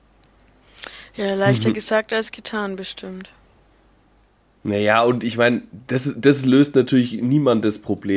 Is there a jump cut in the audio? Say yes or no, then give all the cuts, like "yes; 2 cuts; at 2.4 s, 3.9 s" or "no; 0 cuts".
no; 0 cuts